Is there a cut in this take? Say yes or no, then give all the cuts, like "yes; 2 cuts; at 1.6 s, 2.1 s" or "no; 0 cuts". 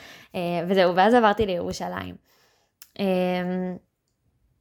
no; 0 cuts